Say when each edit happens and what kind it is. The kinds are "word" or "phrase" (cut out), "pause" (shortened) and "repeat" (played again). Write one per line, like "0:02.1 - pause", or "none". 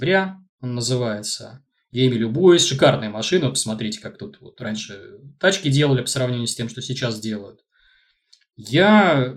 none